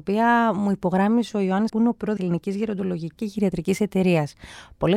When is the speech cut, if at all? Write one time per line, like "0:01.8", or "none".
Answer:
0:01.7
0:02.2
0:03.2